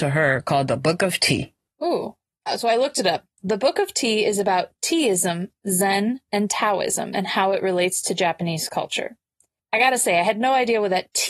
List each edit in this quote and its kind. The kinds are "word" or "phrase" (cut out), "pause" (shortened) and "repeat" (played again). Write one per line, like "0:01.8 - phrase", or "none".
none